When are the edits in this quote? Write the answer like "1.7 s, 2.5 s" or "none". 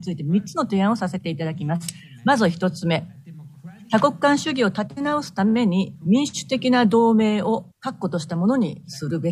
7.7 s